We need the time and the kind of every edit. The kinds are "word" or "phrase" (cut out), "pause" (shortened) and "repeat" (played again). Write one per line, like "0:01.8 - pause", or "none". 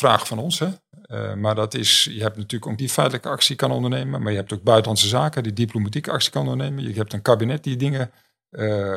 0:02.8 - word